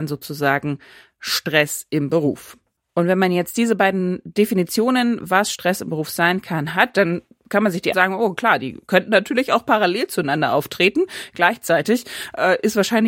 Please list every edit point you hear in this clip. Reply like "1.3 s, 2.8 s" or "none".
7.9 s